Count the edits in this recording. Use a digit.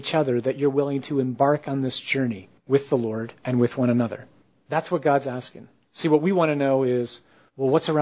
4